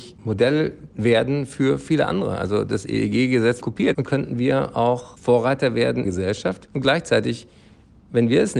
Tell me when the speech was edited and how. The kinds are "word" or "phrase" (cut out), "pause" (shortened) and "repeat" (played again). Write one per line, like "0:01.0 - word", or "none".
0:00.9 - pause
0:03.6 - word
0:04.0 - word
0:06.0 - phrase

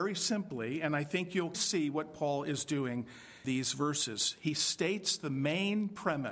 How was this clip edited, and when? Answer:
0:01.5 - word
0:03.4 - word

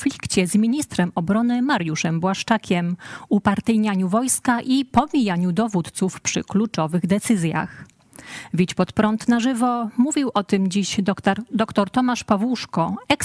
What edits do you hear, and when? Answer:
none

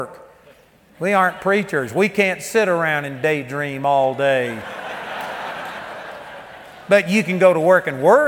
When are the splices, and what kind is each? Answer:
none

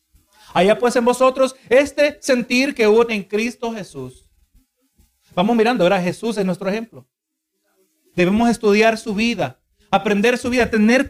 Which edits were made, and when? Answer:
0:03.1 - word

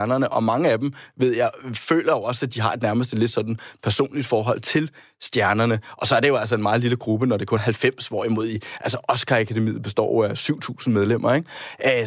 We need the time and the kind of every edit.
0:07.6 - word

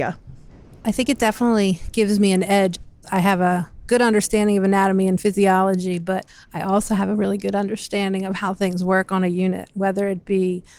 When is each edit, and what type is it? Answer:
none

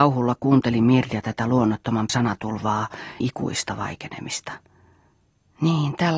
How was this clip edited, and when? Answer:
0:02.1 - word
0:03.2 - word

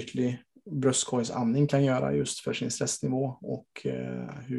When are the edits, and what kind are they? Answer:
none

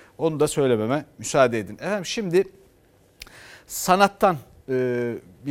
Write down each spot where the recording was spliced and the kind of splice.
none

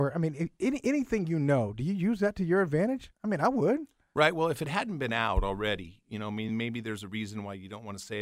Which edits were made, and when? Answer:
none

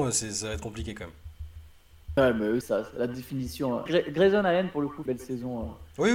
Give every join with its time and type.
0:02.6 - word
0:03.9 - word
0:05.1 - phrase

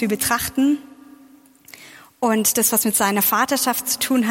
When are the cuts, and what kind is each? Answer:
none

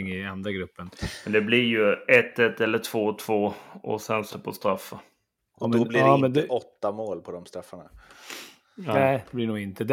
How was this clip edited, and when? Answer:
0:04.3 - word
0:05.4 - pause

